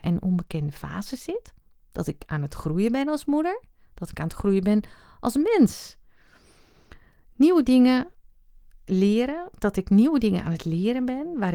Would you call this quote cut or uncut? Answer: uncut